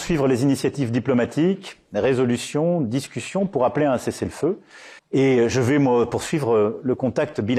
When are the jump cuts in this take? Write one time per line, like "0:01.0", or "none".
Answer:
0:05.0